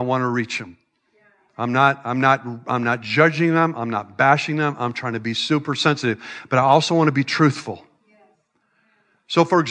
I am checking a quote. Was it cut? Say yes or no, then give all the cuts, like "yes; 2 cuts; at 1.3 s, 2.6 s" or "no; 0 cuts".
no; 0 cuts